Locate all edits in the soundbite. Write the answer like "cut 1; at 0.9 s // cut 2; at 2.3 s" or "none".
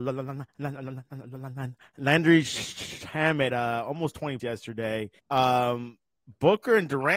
cut 1; at 3.5 s // cut 2; at 4.4 s // cut 3; at 5.2 s

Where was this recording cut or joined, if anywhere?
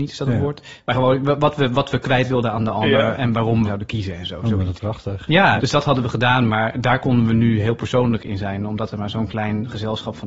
cut 1; at 3.7 s // cut 2; at 4.8 s // cut 3; at 5.6 s

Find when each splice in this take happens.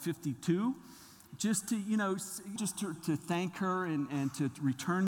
cut 1; at 2.6 s // cut 2; at 3.0 s

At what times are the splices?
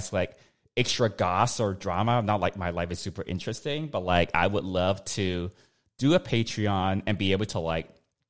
none

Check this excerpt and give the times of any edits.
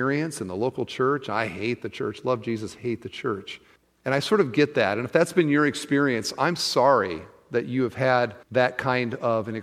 cut 1; at 3.8 s // cut 2; at 8.4 s

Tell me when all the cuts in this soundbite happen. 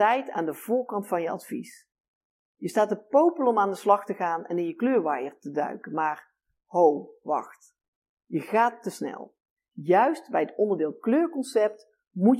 none

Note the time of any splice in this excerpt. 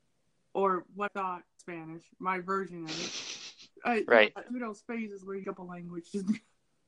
cut 1; at 1.1 s // cut 2; at 1.6 s // cut 3; at 3.8 s // cut 4; at 4.5 s // cut 5; at 5.4 s

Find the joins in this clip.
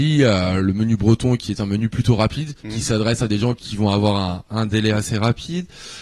cut 1; at 2.6 s

